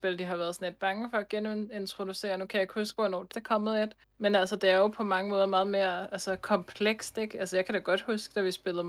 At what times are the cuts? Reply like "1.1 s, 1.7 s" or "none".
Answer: 3.3 s, 4.0 s